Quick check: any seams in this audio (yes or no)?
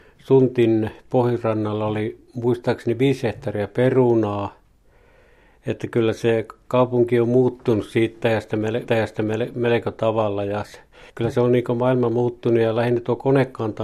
yes